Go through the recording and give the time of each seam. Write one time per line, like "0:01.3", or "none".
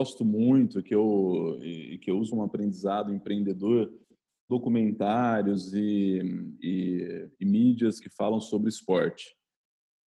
0:02.3
0:04.5
0:06.6
0:08.0

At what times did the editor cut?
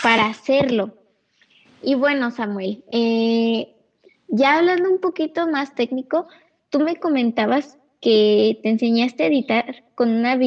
none

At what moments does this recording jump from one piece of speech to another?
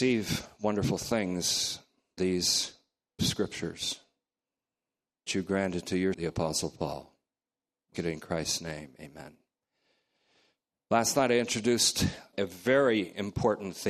0:02.2
0:03.2
0:05.3
0:06.1
0:07.9
0:12.3

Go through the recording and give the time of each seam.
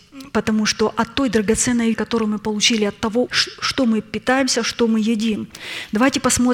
0:01.9
0:03.3

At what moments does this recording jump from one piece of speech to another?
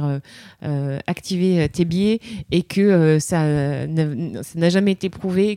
none

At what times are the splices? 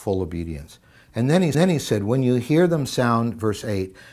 0:01.5

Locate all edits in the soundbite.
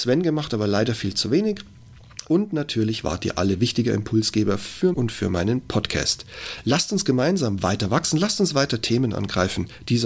0:04.9

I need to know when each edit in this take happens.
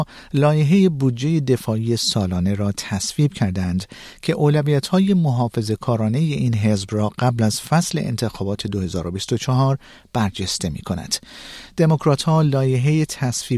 none

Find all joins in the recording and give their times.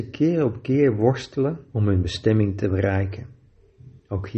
0:01.7

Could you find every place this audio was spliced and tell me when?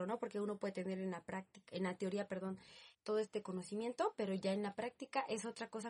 0:02.9

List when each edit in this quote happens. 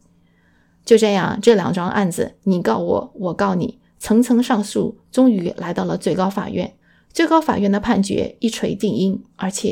0:06.8

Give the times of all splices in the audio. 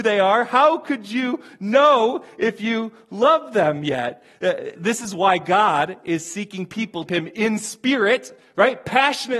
0:04.7
0:07.1

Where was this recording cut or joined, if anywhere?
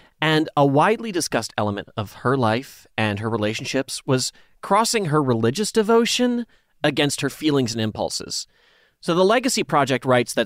none

